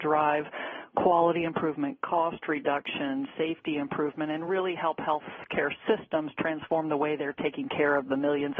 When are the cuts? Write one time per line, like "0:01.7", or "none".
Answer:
none